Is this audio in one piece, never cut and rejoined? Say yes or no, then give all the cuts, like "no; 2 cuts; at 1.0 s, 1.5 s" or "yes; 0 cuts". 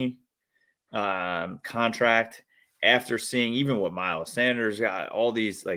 yes; 0 cuts